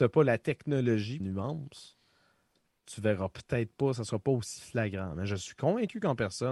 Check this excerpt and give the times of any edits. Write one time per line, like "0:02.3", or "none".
0:01.2